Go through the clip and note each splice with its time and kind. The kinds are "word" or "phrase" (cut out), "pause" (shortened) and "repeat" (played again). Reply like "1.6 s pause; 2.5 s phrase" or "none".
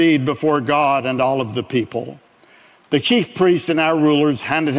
none